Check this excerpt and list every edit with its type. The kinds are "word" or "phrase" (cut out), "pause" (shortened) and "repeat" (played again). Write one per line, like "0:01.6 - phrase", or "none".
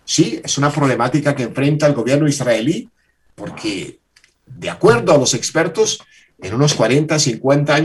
none